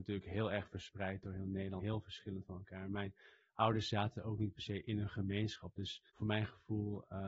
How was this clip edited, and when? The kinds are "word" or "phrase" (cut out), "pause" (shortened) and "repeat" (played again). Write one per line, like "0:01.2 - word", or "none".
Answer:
0:01.8 - word
0:06.1 - pause

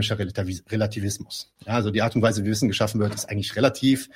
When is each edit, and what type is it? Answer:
none

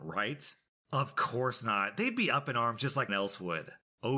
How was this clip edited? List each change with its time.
0:03.1 - word

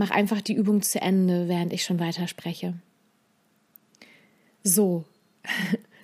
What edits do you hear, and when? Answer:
none

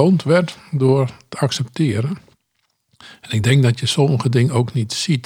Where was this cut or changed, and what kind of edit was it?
none

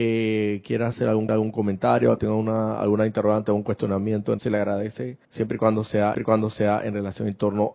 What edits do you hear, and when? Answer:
0:01.3 - repeat
0:04.4 - word
0:05.2 - pause
0:06.1 - repeat

